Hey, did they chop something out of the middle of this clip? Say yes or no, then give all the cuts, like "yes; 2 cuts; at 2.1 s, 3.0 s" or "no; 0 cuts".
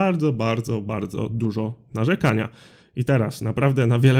no; 0 cuts